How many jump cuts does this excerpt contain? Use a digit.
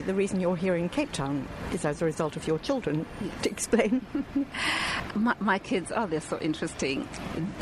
1